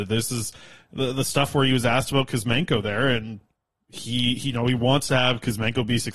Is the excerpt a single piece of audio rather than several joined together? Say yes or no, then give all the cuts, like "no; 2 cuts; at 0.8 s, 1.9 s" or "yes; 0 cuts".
yes; 0 cuts